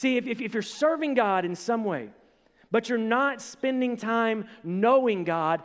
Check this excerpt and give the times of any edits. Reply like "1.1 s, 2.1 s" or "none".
none